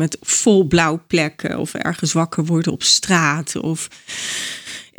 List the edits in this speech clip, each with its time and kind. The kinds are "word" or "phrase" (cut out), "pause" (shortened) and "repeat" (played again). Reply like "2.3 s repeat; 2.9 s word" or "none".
none